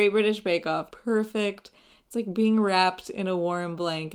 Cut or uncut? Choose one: cut